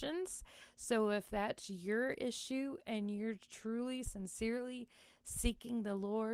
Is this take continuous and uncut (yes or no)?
yes